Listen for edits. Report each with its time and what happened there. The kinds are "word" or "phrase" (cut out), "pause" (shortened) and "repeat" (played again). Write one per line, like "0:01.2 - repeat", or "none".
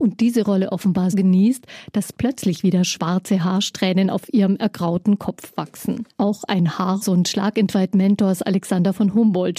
0:01.1 - word
0:06.1 - pause
0:07.0 - phrase